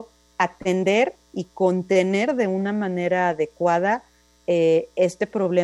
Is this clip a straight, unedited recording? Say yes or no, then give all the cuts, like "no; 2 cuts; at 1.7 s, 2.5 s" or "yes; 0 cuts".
yes; 0 cuts